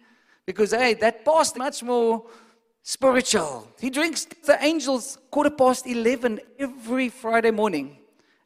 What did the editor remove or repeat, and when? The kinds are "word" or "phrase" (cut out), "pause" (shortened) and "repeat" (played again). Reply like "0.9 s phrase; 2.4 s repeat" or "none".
1.5 s word; 4.4 s word